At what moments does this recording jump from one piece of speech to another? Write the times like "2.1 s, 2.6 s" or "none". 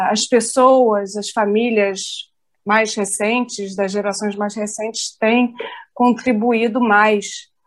none